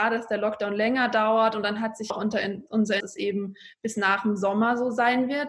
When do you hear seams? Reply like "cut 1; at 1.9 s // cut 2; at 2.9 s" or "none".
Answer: cut 1; at 2.1 s // cut 2; at 3.0 s